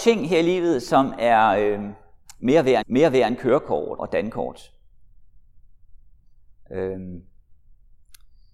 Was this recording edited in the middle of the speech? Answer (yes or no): yes